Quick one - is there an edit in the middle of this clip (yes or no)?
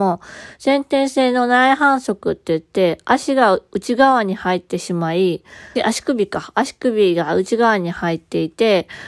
yes